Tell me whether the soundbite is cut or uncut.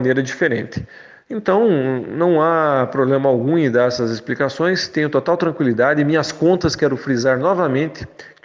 uncut